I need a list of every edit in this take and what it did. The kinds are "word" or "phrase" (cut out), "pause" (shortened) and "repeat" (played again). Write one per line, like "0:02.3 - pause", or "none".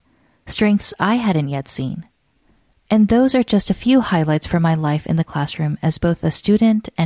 none